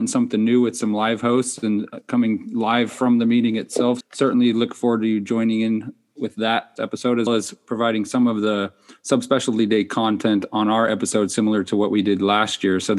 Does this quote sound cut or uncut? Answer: cut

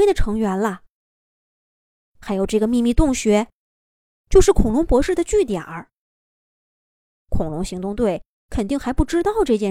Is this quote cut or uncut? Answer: uncut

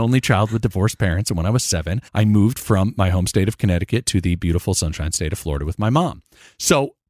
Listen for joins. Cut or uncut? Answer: cut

